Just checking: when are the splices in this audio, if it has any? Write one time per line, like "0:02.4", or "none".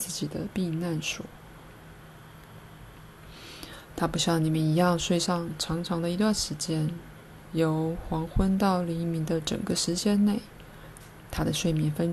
0:07.4